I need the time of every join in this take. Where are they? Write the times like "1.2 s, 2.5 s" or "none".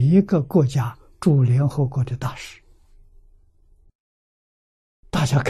none